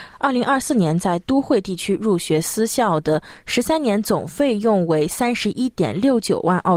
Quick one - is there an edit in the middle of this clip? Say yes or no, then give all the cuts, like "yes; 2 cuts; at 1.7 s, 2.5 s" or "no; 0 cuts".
no; 0 cuts